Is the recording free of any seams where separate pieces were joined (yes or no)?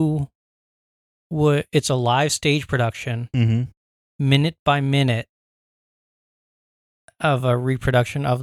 yes